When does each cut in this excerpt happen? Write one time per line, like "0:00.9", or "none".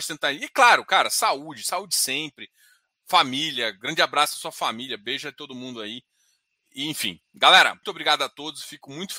0:07.8